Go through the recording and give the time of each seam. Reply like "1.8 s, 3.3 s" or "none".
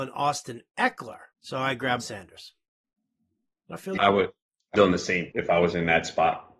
1.3 s, 2.0 s, 4.0 s, 4.7 s, 5.3 s